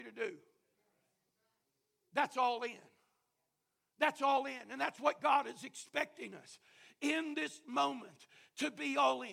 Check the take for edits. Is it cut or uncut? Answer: uncut